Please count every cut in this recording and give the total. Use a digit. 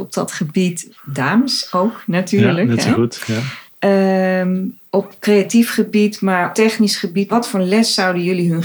4